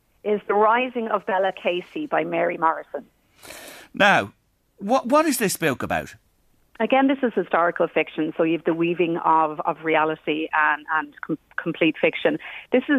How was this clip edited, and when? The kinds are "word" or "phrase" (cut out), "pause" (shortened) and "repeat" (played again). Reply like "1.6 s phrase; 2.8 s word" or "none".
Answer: none